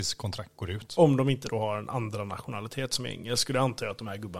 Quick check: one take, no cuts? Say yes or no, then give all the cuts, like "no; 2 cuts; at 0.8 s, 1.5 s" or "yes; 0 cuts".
yes; 0 cuts